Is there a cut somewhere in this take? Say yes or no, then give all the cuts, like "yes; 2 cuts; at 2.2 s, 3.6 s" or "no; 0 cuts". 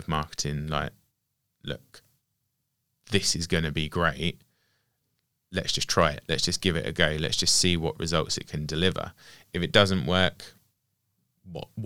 no; 0 cuts